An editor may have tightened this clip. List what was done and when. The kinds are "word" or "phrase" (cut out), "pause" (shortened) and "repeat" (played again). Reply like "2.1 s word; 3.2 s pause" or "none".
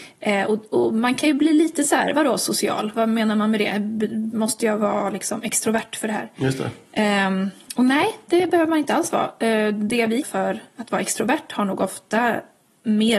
10.2 s word